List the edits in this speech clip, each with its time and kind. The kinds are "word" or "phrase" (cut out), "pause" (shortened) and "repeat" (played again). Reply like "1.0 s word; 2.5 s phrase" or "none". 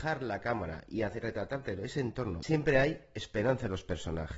2.4 s word